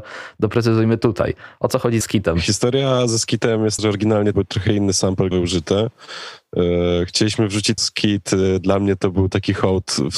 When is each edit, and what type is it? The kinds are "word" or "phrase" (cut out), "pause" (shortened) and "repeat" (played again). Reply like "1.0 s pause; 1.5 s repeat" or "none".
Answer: 2.0 s word; 3.8 s word; 4.3 s word; 5.3 s word; 7.8 s word